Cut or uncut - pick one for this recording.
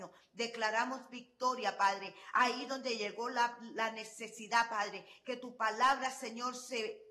uncut